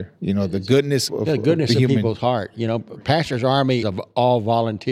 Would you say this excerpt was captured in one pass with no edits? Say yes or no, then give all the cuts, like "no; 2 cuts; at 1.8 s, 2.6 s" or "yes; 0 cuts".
no; 2 cuts; at 1.1 s, 3.8 s